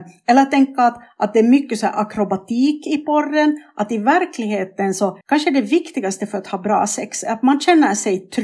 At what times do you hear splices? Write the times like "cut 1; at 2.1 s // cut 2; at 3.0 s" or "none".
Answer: cut 1; at 5.2 s